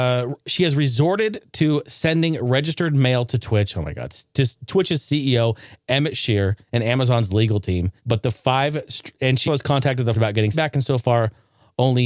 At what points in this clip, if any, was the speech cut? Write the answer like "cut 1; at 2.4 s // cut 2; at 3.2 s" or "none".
cut 1; at 6.6 s // cut 2; at 8.0 s // cut 3; at 9.5 s // cut 4; at 10.1 s // cut 5; at 10.5 s